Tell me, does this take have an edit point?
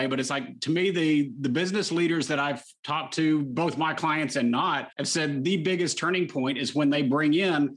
yes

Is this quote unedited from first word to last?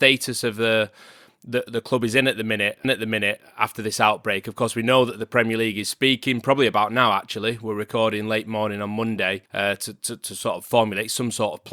no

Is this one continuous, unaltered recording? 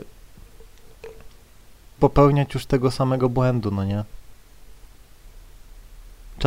no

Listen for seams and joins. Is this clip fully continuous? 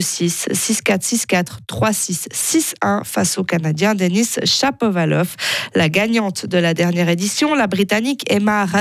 yes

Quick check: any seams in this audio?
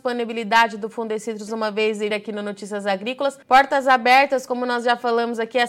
yes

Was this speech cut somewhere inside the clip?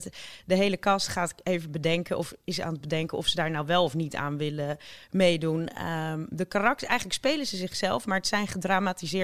no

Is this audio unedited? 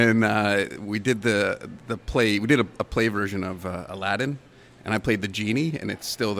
yes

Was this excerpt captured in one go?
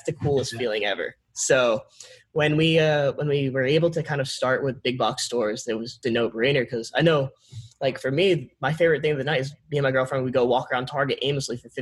no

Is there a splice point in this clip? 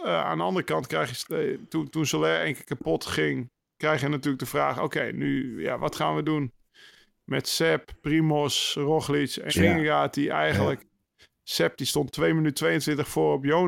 yes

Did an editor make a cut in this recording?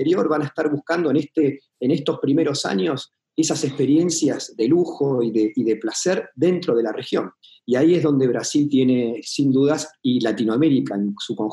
no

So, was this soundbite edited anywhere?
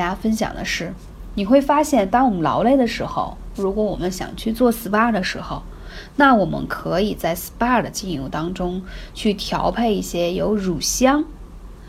no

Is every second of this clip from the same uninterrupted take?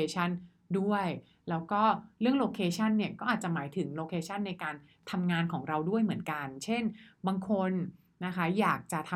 yes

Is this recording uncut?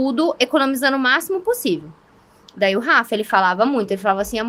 yes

